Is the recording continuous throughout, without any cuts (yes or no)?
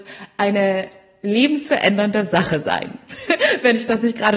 yes